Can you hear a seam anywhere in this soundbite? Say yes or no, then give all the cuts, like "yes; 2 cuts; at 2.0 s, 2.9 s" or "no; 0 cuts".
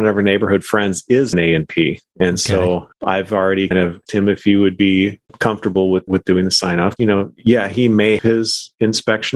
yes; 8 cuts; at 1.3 s, 2.9 s, 3.7 s, 4.1 s, 5.3 s, 6.1 s, 7.0 s, 8.2 s